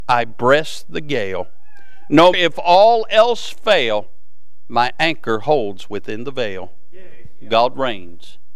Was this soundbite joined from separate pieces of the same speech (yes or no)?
yes